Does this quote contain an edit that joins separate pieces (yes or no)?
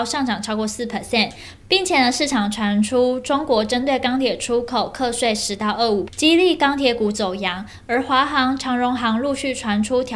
yes